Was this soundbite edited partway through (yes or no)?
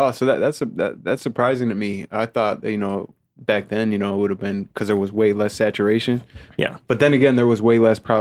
no